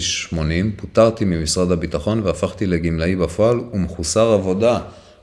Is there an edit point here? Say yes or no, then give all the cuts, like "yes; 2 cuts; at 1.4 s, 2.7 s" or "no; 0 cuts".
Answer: no; 0 cuts